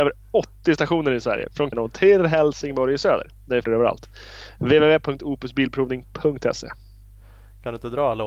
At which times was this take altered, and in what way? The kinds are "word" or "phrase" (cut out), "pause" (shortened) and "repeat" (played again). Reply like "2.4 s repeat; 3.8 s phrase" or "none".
1.7 s word; 3.6 s phrase